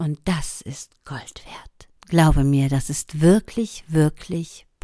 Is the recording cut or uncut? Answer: cut